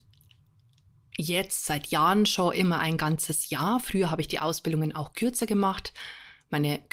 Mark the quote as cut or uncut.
uncut